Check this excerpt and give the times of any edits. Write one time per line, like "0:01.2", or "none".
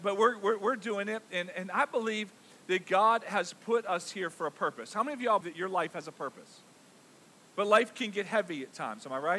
0:01.5
0:05.4